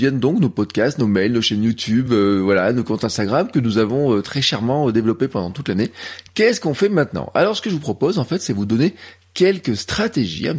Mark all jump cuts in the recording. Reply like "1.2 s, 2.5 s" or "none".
none